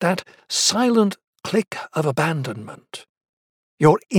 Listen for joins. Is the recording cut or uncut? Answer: uncut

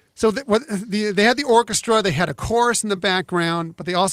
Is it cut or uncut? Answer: uncut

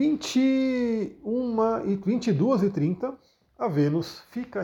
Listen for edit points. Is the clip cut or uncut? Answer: uncut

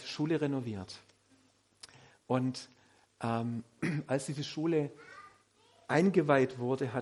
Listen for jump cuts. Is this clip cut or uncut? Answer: uncut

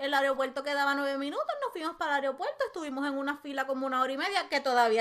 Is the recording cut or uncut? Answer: uncut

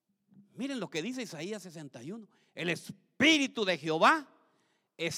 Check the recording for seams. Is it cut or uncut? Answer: uncut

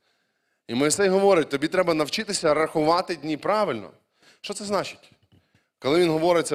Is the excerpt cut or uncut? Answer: uncut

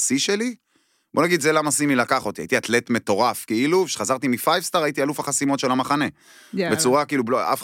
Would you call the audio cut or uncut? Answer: uncut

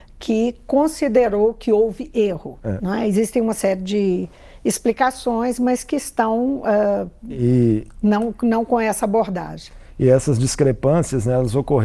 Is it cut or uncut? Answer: uncut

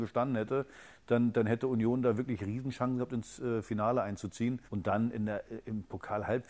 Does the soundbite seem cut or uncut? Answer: cut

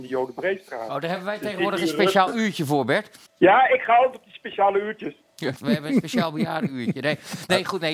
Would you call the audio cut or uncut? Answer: cut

